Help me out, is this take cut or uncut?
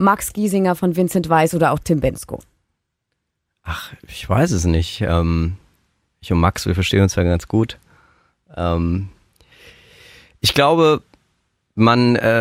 uncut